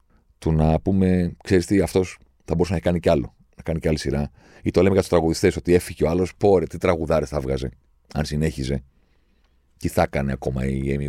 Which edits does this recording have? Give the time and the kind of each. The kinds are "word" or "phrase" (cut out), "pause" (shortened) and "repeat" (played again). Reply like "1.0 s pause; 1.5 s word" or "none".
none